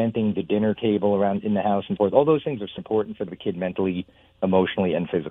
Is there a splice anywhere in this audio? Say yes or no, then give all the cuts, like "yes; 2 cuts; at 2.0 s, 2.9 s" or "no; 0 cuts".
yes; 3 cuts; at 2.0 s, 2.8 s, 3.3 s